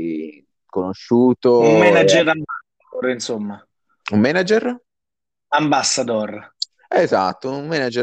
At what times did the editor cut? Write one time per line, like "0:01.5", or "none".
none